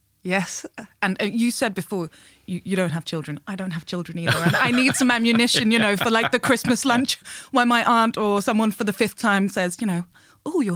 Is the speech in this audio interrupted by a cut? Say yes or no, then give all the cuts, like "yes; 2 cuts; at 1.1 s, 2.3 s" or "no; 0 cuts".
no; 0 cuts